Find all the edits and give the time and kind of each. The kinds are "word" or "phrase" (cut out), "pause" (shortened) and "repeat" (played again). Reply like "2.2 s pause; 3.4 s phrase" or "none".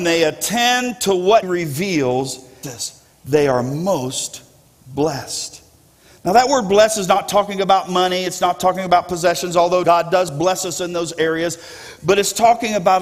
1.4 s word; 2.6 s word; 9.8 s word

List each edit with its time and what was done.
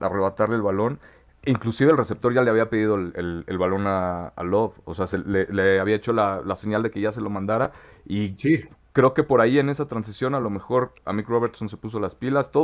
none

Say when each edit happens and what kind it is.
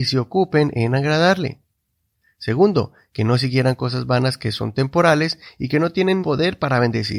6.2 s word

